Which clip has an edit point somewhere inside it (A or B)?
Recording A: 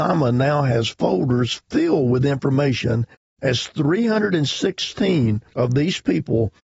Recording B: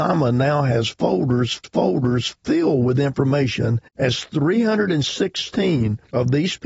B